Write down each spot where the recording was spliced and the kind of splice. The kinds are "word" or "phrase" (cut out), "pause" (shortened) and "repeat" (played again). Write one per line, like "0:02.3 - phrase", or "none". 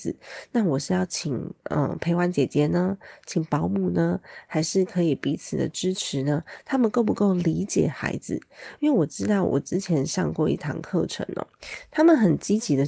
0:01.6 - pause